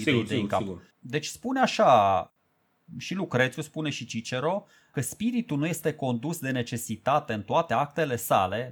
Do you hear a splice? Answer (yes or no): yes